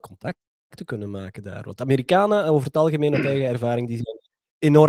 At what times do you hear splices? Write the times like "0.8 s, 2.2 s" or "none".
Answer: none